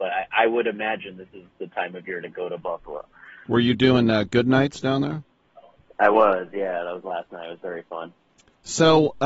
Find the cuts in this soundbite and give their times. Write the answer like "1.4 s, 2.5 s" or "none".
none